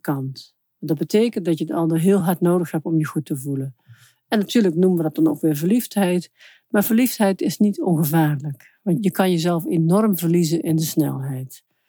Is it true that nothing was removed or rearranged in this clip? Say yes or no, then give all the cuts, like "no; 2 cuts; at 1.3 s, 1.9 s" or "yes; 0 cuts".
yes; 0 cuts